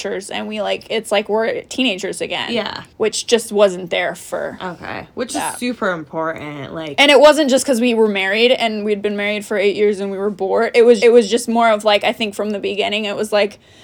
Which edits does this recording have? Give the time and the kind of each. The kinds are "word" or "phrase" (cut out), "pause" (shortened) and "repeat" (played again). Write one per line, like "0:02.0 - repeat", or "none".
0:02.9 - pause
0:11.0 - repeat